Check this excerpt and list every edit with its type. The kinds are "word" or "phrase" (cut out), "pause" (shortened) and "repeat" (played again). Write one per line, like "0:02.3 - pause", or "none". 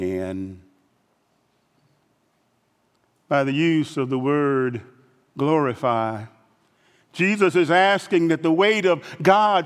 none